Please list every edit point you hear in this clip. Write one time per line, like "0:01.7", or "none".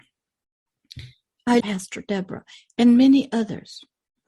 0:01.6